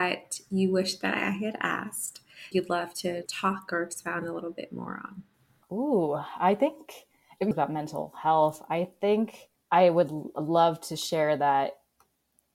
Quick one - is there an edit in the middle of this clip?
yes; 3 cuts; at 2.5 s, 3.3 s, 7.5 s

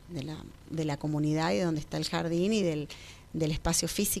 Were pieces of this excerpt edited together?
no; 0 cuts

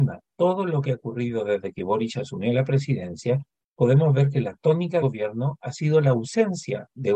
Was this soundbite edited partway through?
yes; 1 cut; at 5.0 s

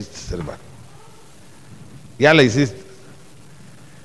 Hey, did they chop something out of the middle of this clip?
no; 0 cuts

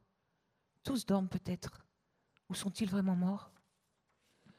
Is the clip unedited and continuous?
yes; 0 cuts

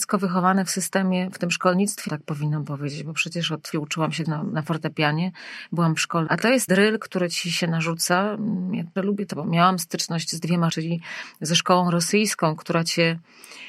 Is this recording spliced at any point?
yes; 8 cuts; at 2.1 s, 3.7 s, 4.2 s, 6.3 s, 6.7 s, 9.0 s, 9.3 s, 10.7 s

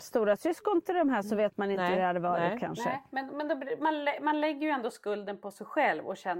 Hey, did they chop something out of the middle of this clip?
no; 0 cuts

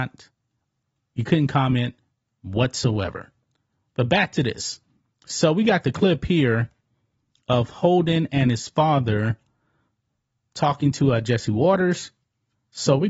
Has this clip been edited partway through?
no; 0 cuts

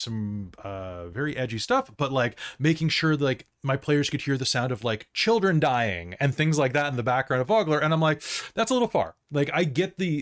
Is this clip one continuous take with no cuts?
no; 1 cut; at 9.2 s

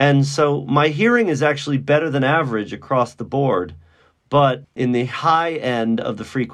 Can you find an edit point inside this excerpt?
no; 0 cuts

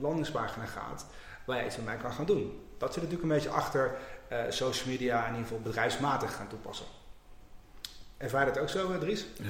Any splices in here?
no; 0 cuts

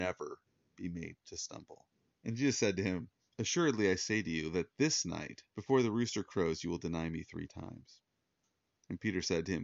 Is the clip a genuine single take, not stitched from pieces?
no; 3 cuts; at 2.1 s, 3.3 s, 5.5 s

